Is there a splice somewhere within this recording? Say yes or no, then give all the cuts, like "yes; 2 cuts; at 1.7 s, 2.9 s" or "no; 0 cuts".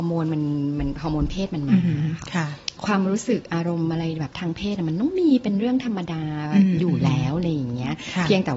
yes; 1 cut; at 2.8 s